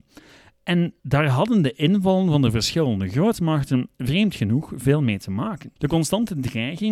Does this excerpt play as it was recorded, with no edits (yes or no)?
no